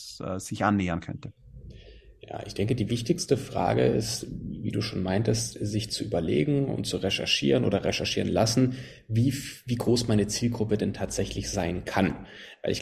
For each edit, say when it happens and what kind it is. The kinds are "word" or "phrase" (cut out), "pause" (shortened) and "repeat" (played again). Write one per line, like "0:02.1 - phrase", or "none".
none